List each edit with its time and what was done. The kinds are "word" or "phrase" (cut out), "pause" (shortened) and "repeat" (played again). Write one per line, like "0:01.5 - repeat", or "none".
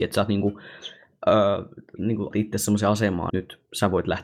0:02.0 - word
0:02.3 - word
0:03.3 - word